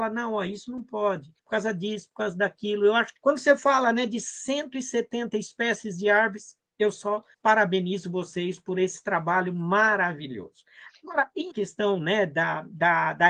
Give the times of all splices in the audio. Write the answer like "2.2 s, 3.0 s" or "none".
1.4 s, 3.2 s, 7.3 s, 11.5 s